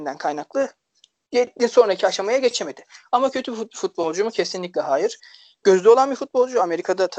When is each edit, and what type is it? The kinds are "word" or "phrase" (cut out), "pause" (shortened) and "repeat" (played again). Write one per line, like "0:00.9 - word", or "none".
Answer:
0:05.6 - phrase